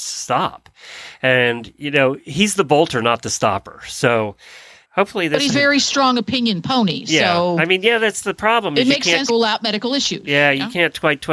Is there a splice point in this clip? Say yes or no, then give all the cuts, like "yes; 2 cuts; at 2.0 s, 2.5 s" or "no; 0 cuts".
yes; 3 cuts; at 4.8 s, 5.5 s, 9.3 s